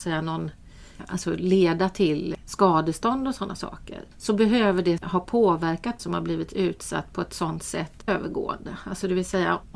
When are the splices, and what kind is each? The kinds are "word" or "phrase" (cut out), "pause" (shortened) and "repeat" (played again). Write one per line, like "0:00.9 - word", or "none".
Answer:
0:04.1 - pause
0:06.0 - word
0:08.1 - phrase

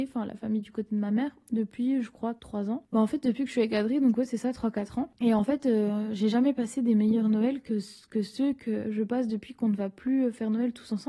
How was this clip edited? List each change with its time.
0:02.4 - pause

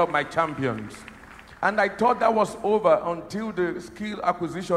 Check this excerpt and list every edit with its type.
none

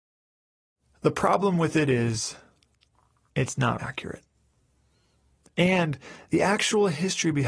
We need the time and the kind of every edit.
0:03.8 - word

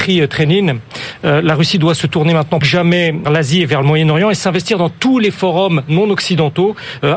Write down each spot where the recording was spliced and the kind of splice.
0:02.6 - word
0:03.3 - word

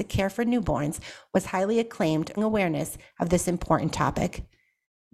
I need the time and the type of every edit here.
0:02.4 - phrase

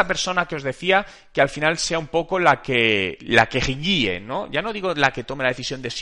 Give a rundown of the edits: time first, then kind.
none

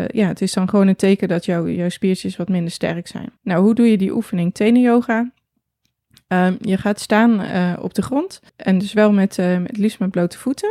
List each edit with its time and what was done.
0:03.4 - pause
0:08.5 - pause

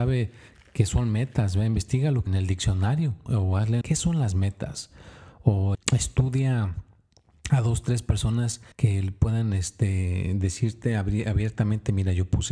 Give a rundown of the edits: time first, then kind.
0:02.3 - phrase
0:03.3 - word
0:03.8 - phrase
0:05.7 - phrase
0:08.7 - pause

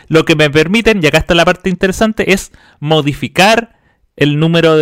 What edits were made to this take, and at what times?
none

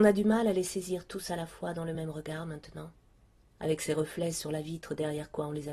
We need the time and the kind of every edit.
none

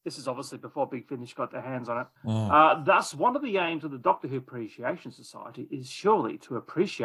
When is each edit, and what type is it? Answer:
0:02.2 - pause

